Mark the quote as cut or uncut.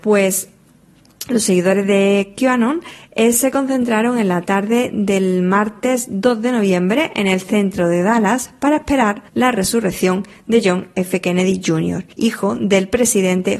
cut